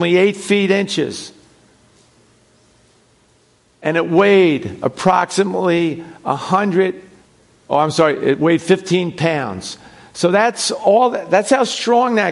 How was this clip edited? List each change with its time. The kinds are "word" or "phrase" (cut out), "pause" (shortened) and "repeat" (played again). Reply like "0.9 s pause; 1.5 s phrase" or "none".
7.3 s pause